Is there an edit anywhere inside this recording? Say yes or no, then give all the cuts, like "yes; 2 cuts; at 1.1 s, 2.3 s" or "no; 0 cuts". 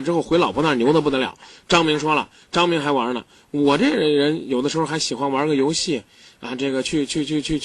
no; 0 cuts